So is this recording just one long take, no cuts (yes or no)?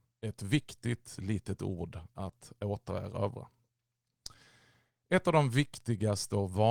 yes